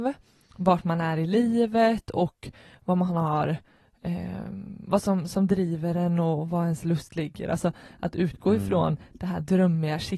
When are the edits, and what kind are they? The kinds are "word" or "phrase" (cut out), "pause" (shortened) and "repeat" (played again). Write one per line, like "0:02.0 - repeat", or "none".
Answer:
none